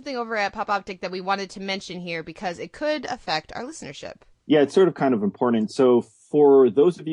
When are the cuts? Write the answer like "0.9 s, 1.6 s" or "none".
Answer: 4.3 s